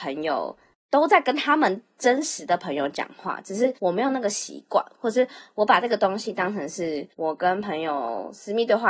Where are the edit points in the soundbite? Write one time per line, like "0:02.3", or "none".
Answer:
0:03.8
0:07.1